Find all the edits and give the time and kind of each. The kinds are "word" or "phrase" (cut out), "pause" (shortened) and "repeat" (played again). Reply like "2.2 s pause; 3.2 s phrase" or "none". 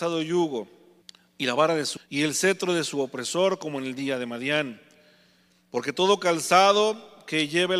1.0 s pause; 2.0 s word